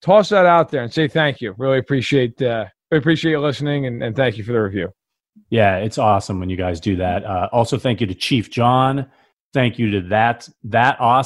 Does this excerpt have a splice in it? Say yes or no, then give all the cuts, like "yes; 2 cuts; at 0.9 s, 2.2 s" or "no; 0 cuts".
no; 0 cuts